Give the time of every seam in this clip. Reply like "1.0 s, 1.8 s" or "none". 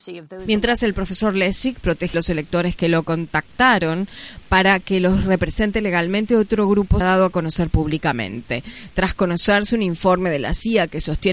2.1 s, 7.0 s